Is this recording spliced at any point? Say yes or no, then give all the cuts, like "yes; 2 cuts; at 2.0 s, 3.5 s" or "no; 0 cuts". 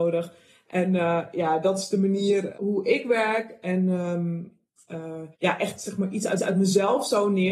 yes; 3 cuts; at 2.5 s, 5.3 s, 6.4 s